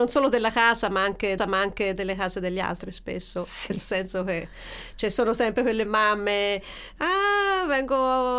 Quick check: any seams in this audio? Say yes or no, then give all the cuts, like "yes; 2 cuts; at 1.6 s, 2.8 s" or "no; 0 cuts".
yes; 1 cut; at 1.4 s